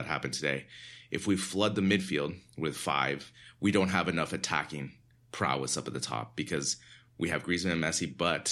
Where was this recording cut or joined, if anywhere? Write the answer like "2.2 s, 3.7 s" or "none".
none

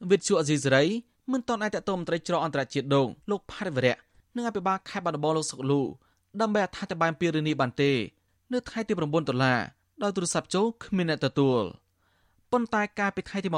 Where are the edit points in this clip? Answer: 3.2 s

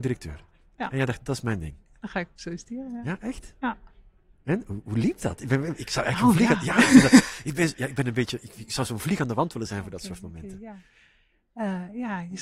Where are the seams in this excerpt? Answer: none

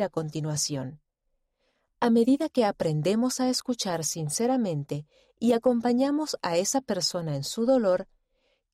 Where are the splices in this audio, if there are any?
none

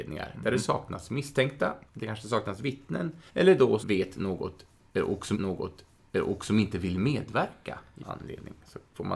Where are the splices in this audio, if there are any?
1.9 s, 3.3 s, 3.8 s, 5.3 s, 8.0 s

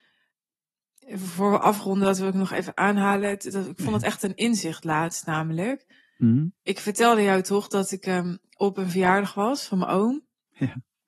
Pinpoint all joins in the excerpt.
none

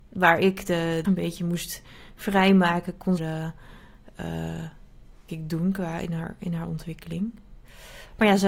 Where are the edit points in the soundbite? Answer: 1.0 s, 3.2 s, 5.3 s

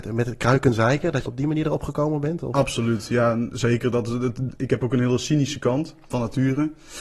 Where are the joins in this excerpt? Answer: 1.3 s, 6.1 s

